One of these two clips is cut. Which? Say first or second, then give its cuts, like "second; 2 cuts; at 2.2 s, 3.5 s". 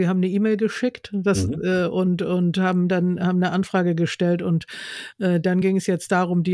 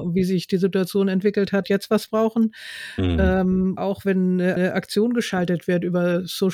second; 3 cuts; at 1.6 s, 3.8 s, 4.6 s